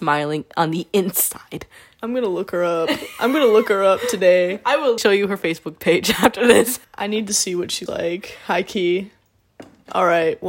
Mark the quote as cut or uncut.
cut